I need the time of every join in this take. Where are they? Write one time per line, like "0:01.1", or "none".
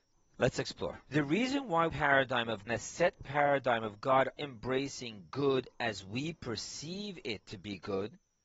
0:01.0
0:01.9
0:02.7
0:04.4